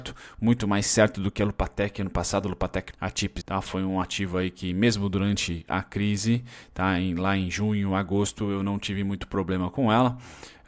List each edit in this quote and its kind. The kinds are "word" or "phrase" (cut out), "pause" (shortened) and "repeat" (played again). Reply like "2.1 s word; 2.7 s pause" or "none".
2.9 s phrase; 3.4 s word